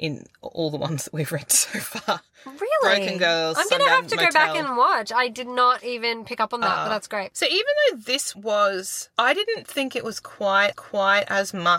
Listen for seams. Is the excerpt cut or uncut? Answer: cut